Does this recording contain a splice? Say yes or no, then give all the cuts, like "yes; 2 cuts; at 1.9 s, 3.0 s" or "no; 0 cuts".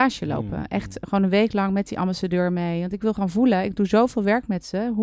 no; 0 cuts